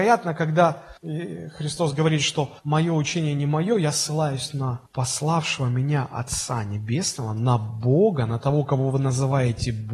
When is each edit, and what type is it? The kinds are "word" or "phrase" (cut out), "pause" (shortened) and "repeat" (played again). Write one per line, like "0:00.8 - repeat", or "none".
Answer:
0:01.0 - pause
0:02.6 - pause
0:04.9 - pause